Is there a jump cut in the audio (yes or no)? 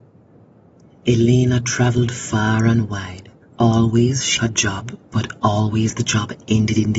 yes